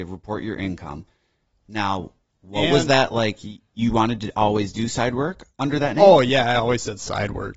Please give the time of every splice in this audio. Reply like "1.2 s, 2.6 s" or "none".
none

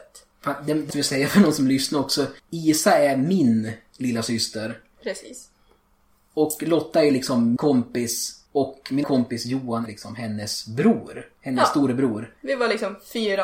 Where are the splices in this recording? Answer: 0.9 s, 2.4 s, 7.6 s, 8.5 s, 9.0 s, 9.9 s, 12.4 s

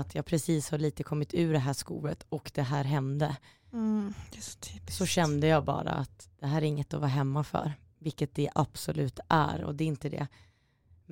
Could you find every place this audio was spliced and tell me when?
none

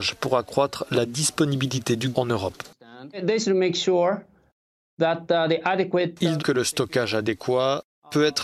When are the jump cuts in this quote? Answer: 2.1 s, 6.4 s

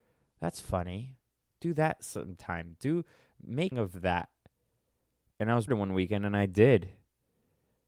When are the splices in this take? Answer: 3.7 s, 5.7 s

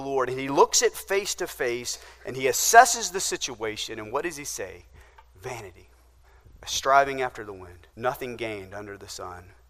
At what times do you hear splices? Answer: 7.9 s

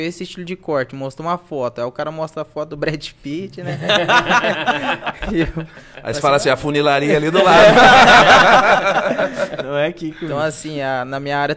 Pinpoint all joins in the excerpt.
none

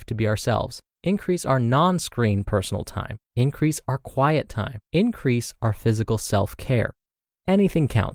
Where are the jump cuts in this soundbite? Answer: 0.9 s, 3.3 s, 4.8 s

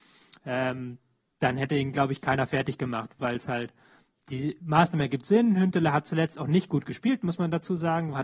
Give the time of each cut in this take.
none

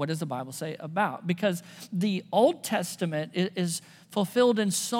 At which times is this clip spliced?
none

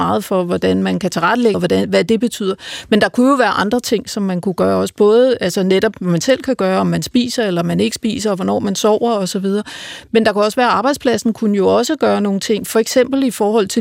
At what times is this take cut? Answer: 1.5 s

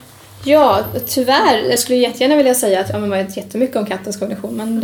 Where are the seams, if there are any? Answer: 1.8 s

